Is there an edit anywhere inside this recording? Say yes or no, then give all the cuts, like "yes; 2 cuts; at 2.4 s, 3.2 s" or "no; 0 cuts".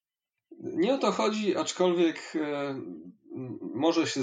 no; 0 cuts